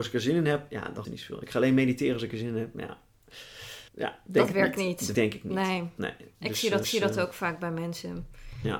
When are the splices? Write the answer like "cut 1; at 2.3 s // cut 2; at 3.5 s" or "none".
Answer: cut 1; at 1.0 s // cut 2; at 3.9 s // cut 3; at 5.1 s // cut 4; at 6.8 s